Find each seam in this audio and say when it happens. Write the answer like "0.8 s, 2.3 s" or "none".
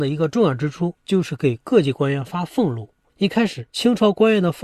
1.0 s, 3.1 s, 3.7 s